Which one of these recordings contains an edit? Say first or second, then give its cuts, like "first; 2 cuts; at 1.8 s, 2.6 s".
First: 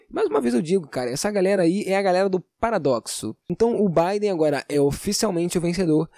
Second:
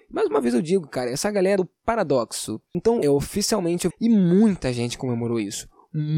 second; 3 cuts; at 1.6 s, 3.0 s, 3.9 s